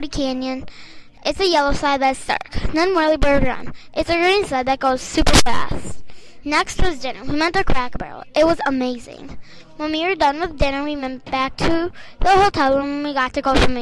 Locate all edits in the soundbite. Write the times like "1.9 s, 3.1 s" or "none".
none